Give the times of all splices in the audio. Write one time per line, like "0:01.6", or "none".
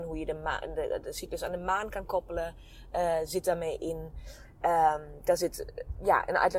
none